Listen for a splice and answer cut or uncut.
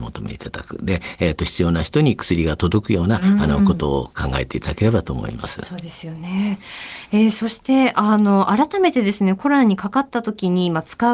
uncut